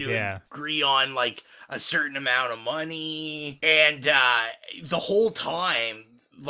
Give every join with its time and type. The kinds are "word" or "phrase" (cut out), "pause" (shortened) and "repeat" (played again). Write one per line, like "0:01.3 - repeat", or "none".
none